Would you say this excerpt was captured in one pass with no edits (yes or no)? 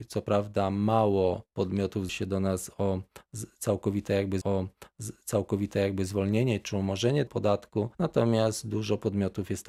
no